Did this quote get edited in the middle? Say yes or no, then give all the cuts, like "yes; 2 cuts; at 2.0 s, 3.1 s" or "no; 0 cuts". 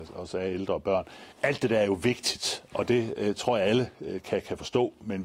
yes; 1 cut; at 1.3 s